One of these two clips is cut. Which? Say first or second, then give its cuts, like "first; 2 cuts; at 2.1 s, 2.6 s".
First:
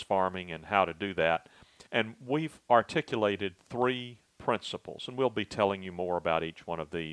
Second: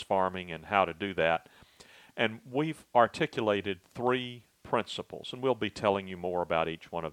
first; 1 cut; at 1.9 s